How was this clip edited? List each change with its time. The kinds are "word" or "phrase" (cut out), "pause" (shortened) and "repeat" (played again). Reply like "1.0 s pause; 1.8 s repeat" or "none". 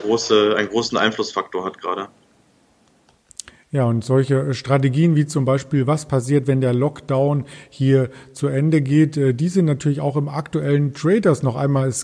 none